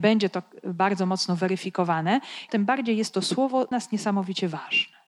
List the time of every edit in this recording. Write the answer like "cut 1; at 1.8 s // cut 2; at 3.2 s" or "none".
cut 1; at 2.5 s // cut 2; at 3.7 s